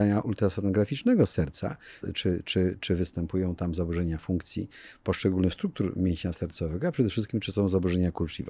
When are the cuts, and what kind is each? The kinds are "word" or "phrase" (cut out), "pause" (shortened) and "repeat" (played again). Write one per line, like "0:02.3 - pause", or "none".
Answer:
0:02.0 - phrase